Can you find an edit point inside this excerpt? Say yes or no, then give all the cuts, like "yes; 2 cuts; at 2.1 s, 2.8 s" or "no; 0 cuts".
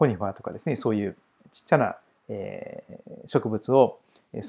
no; 0 cuts